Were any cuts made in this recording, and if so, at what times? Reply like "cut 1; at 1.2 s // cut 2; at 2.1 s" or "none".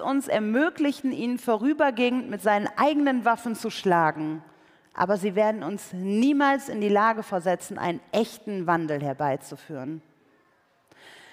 none